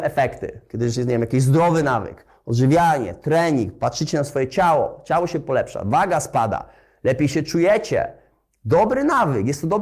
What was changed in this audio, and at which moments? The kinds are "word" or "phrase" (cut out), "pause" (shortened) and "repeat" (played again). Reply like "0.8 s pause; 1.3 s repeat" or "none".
none